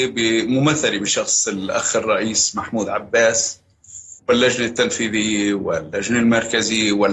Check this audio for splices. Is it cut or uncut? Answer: cut